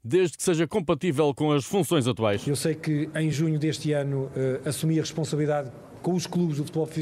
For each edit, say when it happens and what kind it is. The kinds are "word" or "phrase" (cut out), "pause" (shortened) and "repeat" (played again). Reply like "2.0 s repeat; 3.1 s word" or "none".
none

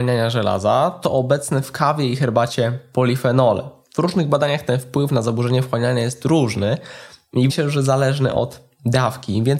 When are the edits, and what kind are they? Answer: 7.5 s word

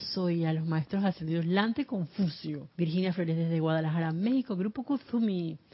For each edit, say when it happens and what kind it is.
2.7 s pause

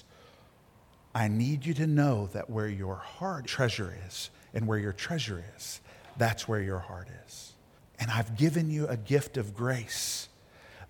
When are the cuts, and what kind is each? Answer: 3.4 s phrase; 7.8 s pause

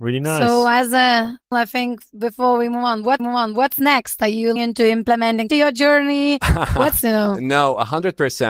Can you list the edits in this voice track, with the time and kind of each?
1.5 s word; 3.2 s repeat; 4.6 s word; 5.5 s phrase; 7.0 s word

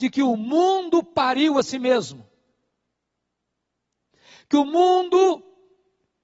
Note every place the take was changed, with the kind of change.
none

